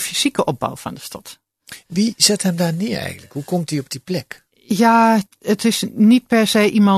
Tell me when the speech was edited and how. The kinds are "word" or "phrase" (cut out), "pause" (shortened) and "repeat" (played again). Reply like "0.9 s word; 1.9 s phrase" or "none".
none